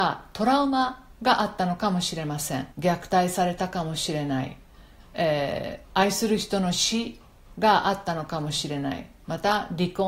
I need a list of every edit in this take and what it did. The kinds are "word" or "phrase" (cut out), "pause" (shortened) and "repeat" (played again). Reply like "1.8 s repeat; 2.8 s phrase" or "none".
1.1 s pause; 2.7 s pause; 5.8 s pause